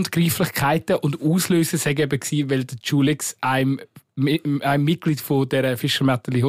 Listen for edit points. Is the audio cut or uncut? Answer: uncut